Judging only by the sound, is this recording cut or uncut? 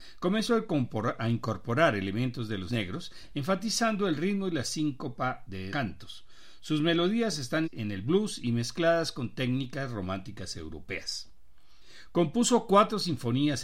cut